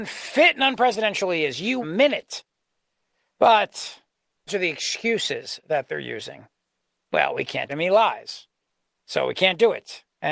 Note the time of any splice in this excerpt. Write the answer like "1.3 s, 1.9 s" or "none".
1.8 s, 4.5 s, 7.7 s